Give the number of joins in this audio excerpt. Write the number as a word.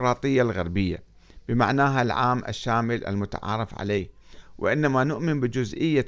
zero